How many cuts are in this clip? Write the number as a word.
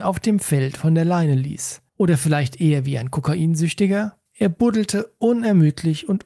two